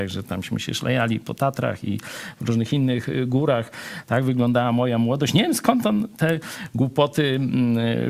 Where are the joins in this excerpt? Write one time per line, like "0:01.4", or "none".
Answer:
none